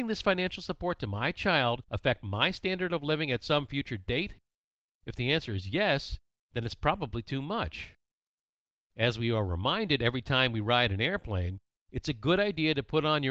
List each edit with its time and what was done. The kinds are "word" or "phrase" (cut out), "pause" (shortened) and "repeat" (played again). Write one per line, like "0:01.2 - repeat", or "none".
none